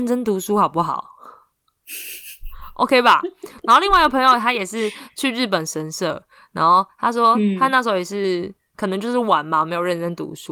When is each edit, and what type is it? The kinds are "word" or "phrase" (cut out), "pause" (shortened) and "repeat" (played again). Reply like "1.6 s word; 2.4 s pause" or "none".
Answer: none